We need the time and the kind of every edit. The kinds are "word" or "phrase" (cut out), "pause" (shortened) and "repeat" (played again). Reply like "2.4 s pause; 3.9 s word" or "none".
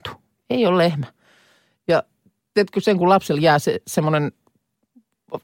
3.0 s word